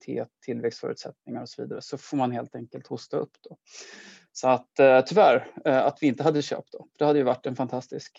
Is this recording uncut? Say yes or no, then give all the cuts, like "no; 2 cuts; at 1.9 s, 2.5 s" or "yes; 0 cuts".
yes; 0 cuts